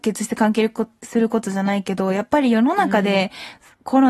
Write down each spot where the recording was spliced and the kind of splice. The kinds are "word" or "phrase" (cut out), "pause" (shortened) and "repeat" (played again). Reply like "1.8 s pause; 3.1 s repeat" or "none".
1.0 s pause